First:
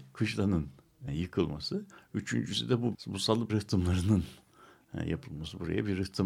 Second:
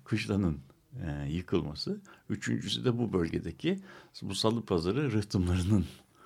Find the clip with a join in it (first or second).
first